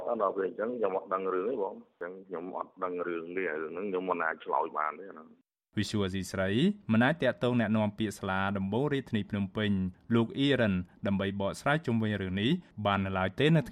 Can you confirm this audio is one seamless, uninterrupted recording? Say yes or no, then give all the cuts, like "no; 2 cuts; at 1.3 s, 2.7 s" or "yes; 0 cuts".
yes; 0 cuts